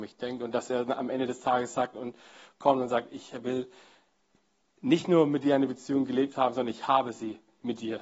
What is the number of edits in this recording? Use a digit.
0